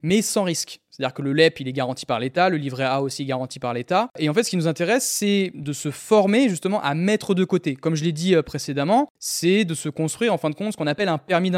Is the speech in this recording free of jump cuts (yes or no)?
yes